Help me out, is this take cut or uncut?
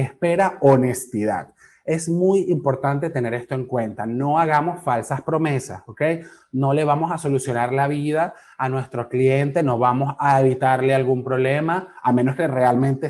uncut